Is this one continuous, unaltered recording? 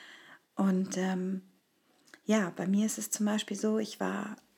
yes; 0 cuts

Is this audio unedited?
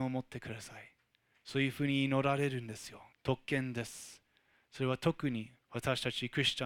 no; 2 cuts; at 3.1 s, 5.6 s

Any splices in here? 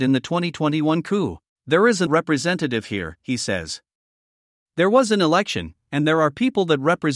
yes; 2 cuts; at 1.5 s, 2.1 s

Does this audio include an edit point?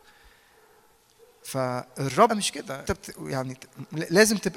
yes; 2 cuts; at 2.3 s, 2.9 s

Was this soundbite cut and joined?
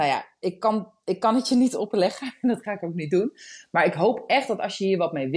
no; 0 cuts

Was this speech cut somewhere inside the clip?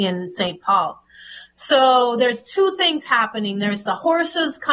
no; 0 cuts

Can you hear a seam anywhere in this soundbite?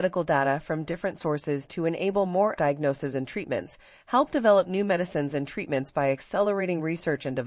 yes; 1 cut; at 2.6 s

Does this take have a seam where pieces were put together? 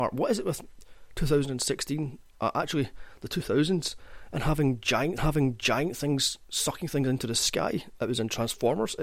yes; 1 cut; at 5.2 s

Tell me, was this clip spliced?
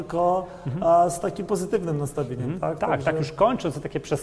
no; 0 cuts

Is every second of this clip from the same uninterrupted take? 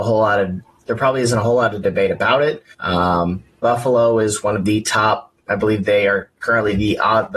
no; 2 cuts; at 2.7 s, 5.4 s

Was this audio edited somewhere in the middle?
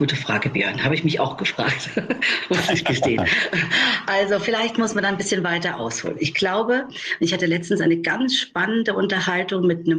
no; 0 cuts

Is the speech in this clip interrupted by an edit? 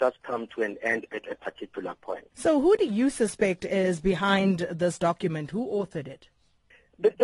yes; 1 cut; at 2.3 s

